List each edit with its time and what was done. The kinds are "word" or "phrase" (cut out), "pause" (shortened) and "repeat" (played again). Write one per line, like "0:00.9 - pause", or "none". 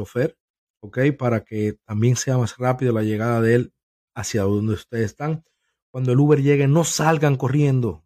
none